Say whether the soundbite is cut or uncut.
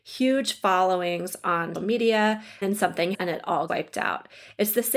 cut